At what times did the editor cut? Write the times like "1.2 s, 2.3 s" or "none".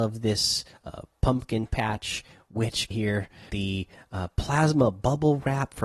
2.9 s, 3.5 s